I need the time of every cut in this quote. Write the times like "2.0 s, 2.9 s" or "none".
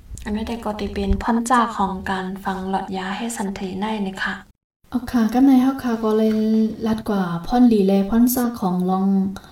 4.5 s